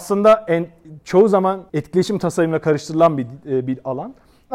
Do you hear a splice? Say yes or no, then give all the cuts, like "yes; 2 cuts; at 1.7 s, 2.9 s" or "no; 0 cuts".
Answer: yes; 1 cut; at 1.7 s